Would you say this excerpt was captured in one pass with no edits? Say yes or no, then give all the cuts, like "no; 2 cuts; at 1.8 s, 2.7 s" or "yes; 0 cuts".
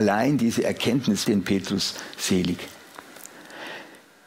no; 1 cut; at 1.2 s